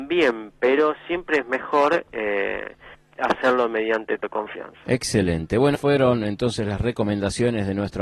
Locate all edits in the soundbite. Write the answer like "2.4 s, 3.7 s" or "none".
2.9 s, 4.2 s, 5.7 s